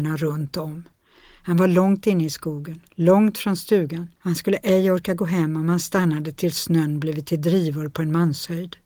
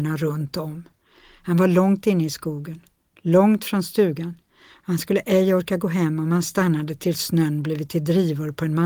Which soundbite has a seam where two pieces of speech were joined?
first; 2 cuts; at 2.9 s, 4.2 s

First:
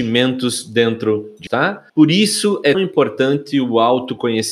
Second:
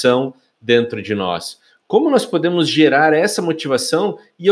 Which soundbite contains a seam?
first; 3 cuts; at 1.5 s, 1.9 s, 2.7 s

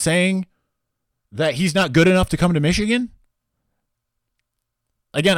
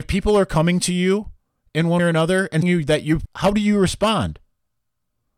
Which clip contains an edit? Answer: second; 3 cuts; at 2.0 s, 2.6 s, 3.3 s

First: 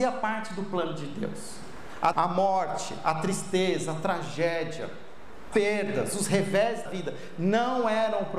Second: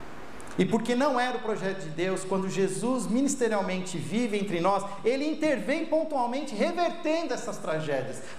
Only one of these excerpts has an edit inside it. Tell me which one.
first; 3 cuts; at 2.1 s, 5.5 s, 6.9 s

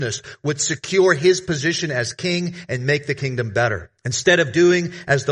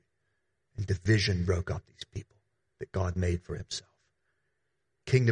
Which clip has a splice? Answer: first; 1 cut; at 4.0 s

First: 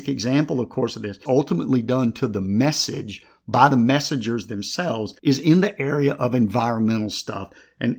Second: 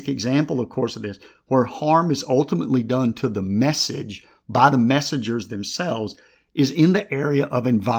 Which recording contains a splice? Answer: first; 2 cuts; at 1.3 s, 5.2 s

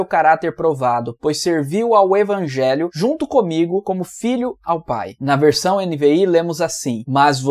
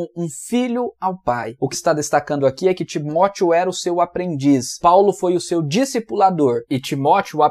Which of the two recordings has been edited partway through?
second; 1 cut; at 1.7 s

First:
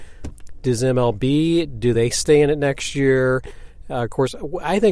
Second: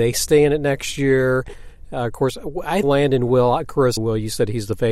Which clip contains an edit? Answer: second; 2 cuts; at 2.8 s, 4.0 s

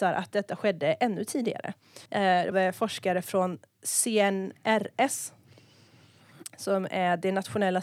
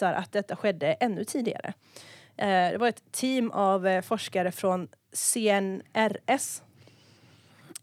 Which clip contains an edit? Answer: first; 2 cuts; at 2.1 s, 2.5 s

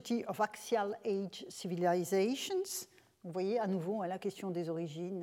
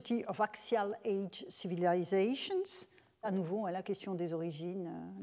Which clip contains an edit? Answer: second; 1 cut; at 3.2 s

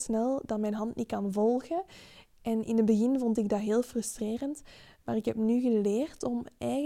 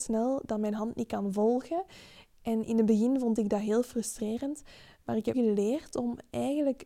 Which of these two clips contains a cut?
second; 1 cut; at 5.3 s

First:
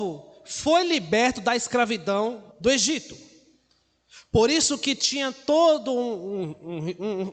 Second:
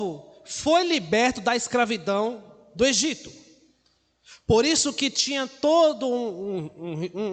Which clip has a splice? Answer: first; 1 cut; at 2.5 s

